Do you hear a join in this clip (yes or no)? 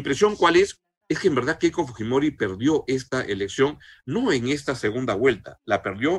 no